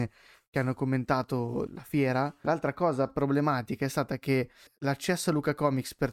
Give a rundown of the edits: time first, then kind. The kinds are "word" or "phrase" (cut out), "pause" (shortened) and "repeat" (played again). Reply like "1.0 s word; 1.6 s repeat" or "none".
1.7 s word; 2.4 s word; 4.7 s word

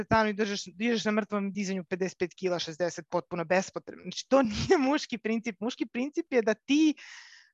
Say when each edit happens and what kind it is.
none

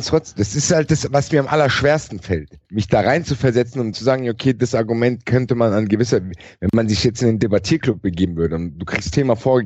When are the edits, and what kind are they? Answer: 2.6 s pause; 3.9 s word

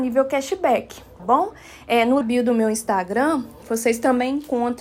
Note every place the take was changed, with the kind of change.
1.2 s word; 2.2 s phrase

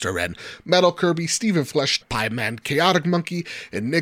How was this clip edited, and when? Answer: 2.0 s phrase

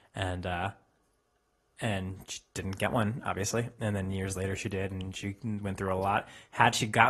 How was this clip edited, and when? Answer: none

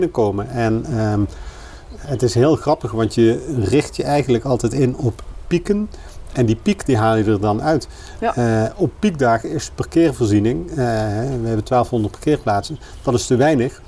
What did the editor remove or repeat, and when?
none

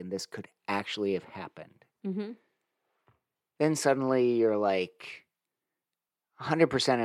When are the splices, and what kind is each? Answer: none

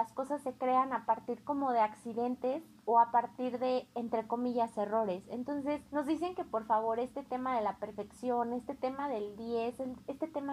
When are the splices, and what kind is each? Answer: 5.9 s pause

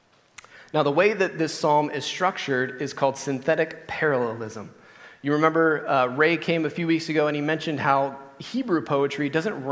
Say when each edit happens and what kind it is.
none

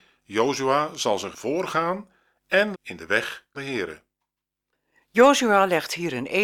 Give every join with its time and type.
1.3 s word; 2.7 s word; 3.5 s word

